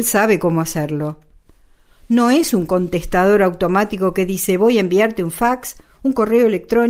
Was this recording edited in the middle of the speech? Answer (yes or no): no